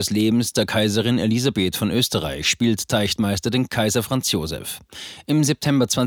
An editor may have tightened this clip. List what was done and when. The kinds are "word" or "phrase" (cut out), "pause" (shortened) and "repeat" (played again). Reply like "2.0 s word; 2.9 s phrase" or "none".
none